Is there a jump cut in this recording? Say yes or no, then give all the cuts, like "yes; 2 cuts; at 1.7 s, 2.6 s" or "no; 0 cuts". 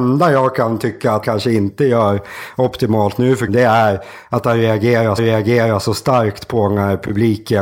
yes; 3 cuts; at 1.2 s, 3.5 s, 5.2 s